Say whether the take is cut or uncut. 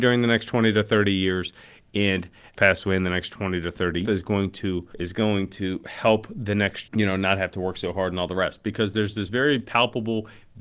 cut